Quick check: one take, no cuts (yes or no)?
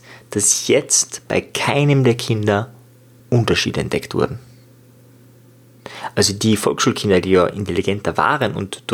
yes